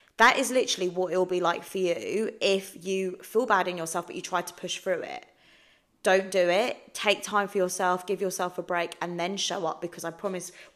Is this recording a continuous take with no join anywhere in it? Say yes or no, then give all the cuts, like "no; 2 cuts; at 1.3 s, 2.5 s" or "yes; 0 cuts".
yes; 0 cuts